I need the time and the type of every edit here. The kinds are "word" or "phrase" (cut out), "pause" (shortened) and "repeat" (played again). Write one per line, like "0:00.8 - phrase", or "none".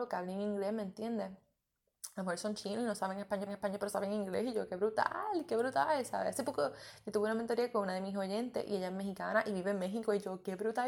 0:03.5 - repeat